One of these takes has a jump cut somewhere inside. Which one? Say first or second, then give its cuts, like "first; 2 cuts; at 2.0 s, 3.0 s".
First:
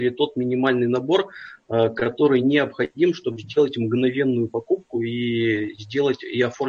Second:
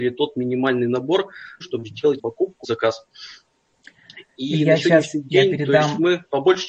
second; 3 cuts; at 1.6 s, 2.2 s, 2.6 s